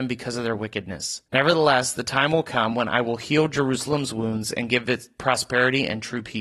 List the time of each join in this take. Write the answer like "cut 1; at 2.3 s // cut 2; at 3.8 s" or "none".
cut 1; at 1.3 s